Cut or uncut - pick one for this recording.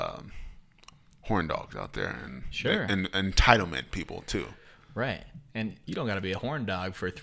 uncut